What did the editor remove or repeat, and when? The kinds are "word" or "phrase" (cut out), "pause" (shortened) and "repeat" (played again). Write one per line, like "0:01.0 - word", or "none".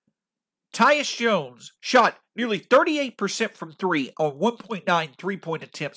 0:01.8 - pause